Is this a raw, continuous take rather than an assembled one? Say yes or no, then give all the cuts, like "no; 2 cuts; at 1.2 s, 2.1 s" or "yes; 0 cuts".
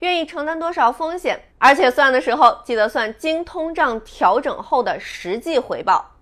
yes; 0 cuts